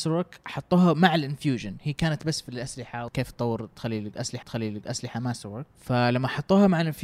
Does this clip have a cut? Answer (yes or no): yes